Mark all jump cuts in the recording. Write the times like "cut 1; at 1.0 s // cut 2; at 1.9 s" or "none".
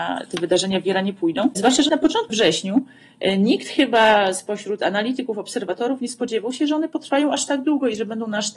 cut 1; at 1.9 s // cut 2; at 2.3 s